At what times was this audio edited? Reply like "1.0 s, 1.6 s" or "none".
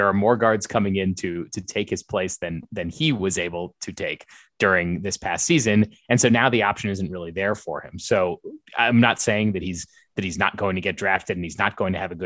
none